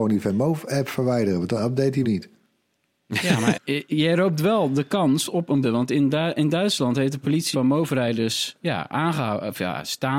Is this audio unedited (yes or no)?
no